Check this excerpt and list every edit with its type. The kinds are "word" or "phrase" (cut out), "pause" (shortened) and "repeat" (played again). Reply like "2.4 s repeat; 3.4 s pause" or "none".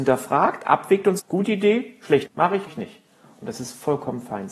1.2 s word; 2.3 s word; 2.7 s word